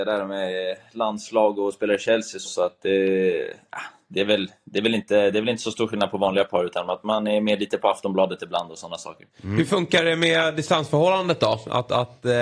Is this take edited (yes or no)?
yes